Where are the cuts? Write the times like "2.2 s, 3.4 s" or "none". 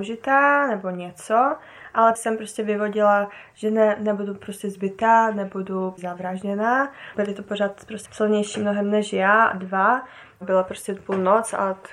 2.2 s, 7.1 s, 8.1 s